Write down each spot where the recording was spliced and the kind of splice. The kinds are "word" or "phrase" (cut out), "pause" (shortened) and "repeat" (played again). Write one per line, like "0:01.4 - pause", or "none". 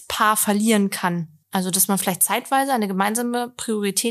0:01.4 - pause